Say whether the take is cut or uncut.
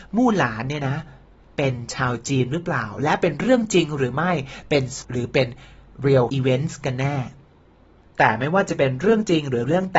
cut